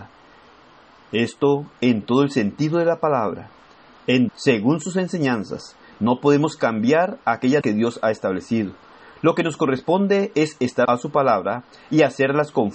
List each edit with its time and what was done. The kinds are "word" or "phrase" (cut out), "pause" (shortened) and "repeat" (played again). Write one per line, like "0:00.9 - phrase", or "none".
0:04.3 - word
0:07.6 - word
0:10.8 - word